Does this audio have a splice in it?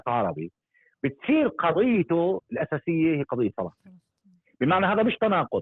no; 0 cuts

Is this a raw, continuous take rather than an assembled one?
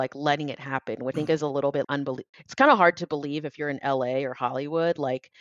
no; 3 cuts; at 1.1 s, 1.8 s, 2.3 s

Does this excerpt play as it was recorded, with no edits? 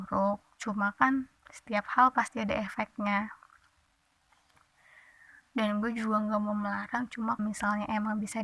no; 1 cut; at 7.4 s

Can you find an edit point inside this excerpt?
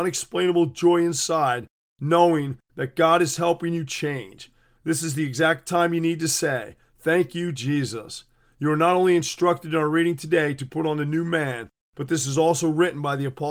no; 0 cuts

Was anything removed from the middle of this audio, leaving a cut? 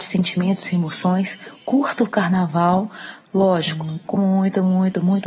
yes; 1 cut; at 4.1 s

